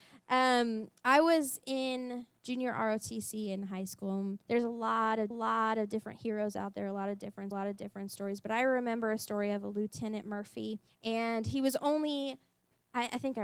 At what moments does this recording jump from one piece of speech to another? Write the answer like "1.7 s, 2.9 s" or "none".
1.0 s, 2.4 s, 4.4 s, 5.3 s, 7.5 s, 10.9 s